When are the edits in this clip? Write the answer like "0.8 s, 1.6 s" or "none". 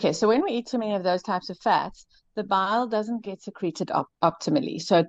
none